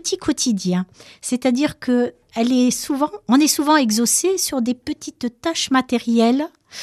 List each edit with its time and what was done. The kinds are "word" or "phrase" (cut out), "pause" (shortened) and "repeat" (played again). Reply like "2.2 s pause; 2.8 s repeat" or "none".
none